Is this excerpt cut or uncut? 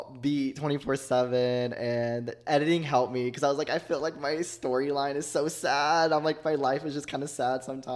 uncut